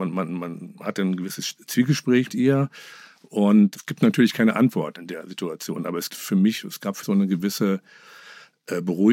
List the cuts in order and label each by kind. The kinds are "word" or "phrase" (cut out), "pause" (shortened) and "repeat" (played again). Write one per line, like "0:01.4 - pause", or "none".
0:02.3 - word
0:06.1 - word
0:07.0 - word

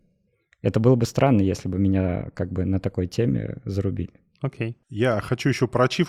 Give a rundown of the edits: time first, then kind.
0:04.8 - pause

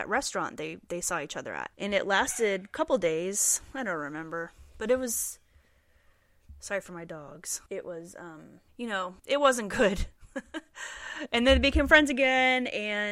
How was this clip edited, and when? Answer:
0:01.7 - pause
0:04.7 - pause
0:07.7 - pause
0:08.7 - pause
0:09.2 - pause

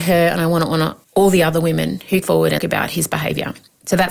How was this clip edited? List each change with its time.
0:01.0 - pause
0:02.2 - word
0:02.6 - word

